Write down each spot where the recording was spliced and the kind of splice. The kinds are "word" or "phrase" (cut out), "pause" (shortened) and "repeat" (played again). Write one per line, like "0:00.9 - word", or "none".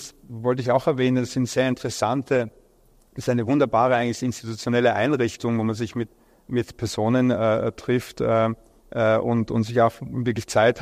none

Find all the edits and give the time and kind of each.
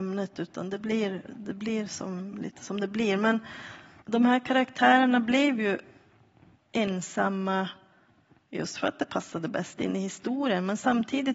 none

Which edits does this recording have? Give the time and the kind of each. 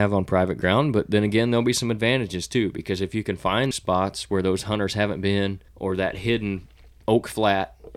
0:03.7 - word
0:05.7 - pause

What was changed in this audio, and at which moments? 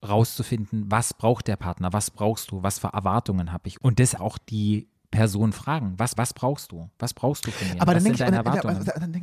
0:04.2 - word
0:06.2 - repeat

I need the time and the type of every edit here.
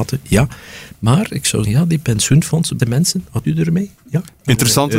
0:01.6 - word
0:02.8 - word
0:03.4 - word

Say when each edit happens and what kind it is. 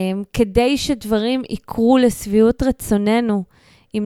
none

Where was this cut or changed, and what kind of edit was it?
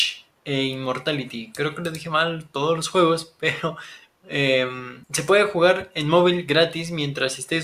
0:05.0 - pause

